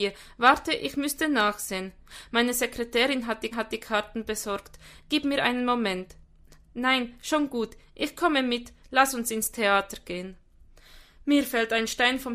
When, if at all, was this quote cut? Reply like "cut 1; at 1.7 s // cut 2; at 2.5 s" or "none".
cut 1; at 3.5 s